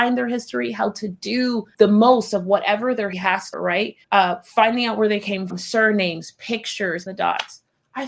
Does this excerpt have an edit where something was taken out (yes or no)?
yes